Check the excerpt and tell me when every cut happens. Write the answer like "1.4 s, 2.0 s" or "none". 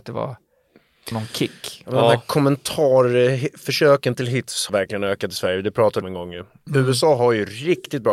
1.1 s, 4.7 s, 6.0 s